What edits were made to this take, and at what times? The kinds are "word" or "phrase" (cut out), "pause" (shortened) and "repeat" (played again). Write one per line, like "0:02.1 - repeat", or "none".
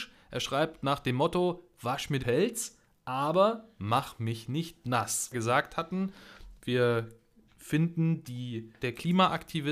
0:02.2 - word
0:05.3 - phrase
0:08.8 - word